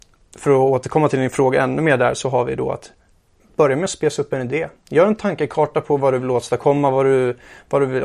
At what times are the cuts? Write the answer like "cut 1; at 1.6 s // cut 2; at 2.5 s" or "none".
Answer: none